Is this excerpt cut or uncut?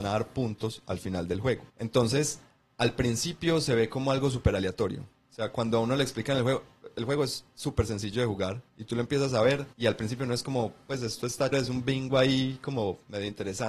cut